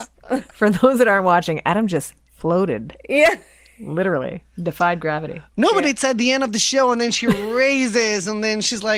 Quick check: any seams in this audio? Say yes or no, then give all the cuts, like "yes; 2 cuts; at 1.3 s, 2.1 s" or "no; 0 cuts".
no; 0 cuts